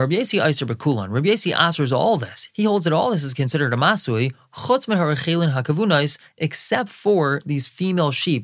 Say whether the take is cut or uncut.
uncut